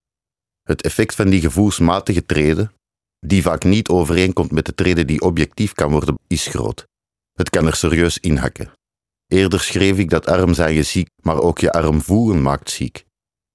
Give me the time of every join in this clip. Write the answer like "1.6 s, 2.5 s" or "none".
6.2 s, 11.1 s